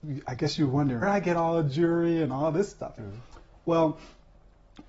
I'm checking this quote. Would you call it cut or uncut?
cut